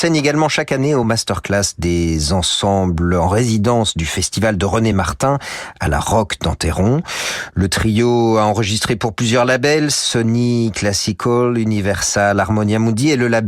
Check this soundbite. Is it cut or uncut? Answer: uncut